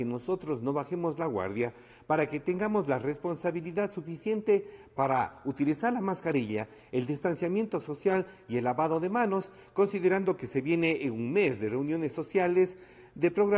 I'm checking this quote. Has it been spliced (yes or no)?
no